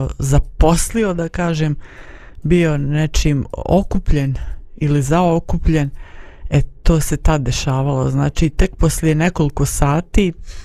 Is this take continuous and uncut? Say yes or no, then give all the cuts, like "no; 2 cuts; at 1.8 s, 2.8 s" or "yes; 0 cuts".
yes; 0 cuts